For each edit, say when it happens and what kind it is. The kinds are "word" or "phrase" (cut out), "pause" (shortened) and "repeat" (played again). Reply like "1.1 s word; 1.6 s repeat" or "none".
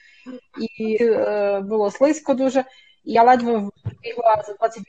1.0 s phrase; 3.2 s word